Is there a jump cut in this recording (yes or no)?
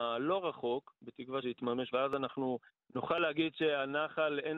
yes